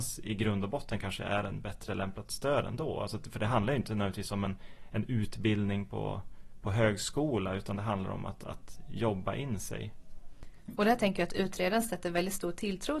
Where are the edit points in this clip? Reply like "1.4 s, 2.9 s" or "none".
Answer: none